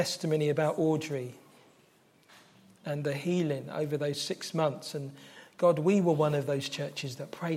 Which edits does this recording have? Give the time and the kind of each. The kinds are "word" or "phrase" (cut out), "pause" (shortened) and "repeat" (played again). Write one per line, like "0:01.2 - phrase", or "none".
none